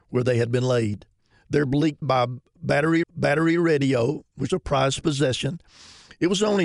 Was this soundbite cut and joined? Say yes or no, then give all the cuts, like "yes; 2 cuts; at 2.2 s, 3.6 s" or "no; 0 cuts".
yes; 4 cuts; at 1.3 s, 2.0 s, 3.0 s, 4.5 s